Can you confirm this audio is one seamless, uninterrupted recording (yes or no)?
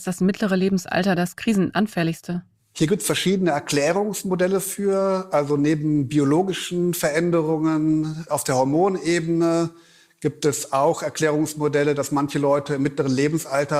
yes